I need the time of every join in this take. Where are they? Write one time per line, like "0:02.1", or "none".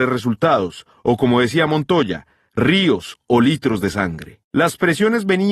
0:04.4